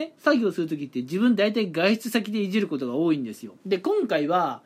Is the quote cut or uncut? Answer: cut